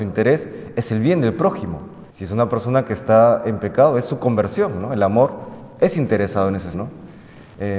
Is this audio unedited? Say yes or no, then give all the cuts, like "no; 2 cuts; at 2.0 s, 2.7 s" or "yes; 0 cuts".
no; 2 cuts; at 2.1 s, 6.7 s